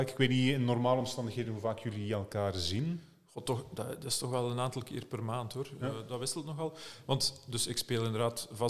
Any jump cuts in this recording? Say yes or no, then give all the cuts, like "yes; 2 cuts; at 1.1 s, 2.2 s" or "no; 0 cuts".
no; 0 cuts